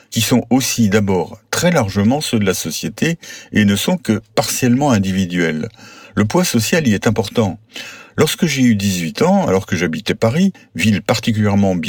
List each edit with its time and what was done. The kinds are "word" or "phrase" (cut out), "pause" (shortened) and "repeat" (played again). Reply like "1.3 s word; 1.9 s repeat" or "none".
none